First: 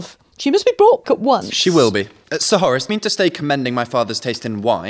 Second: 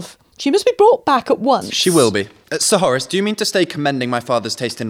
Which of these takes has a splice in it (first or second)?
first